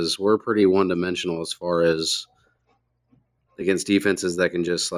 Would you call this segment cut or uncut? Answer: uncut